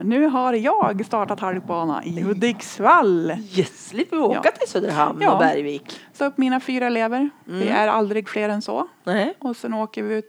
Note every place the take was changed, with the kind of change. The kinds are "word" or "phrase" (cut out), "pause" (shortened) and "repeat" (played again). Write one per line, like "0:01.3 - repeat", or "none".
0:06.2 - phrase